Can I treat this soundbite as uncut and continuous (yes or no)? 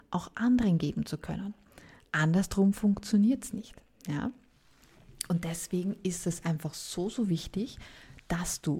yes